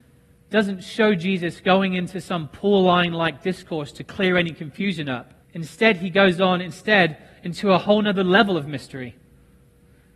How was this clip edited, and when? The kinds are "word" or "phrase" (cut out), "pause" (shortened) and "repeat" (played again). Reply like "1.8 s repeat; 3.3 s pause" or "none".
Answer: 5.4 s pause

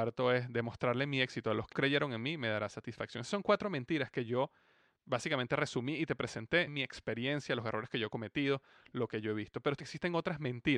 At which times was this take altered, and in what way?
1.7 s word; 6.7 s word; 9.8 s word

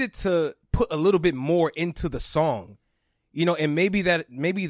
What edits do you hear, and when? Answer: none

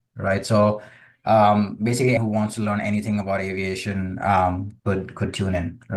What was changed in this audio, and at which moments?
2.2 s word

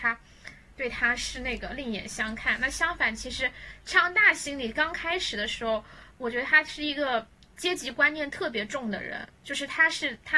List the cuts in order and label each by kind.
9.3 s pause

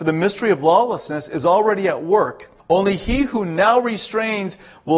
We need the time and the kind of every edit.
2.6 s pause

